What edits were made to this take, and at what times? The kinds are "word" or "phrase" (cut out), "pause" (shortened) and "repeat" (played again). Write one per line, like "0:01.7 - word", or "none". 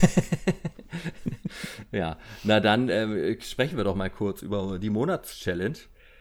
none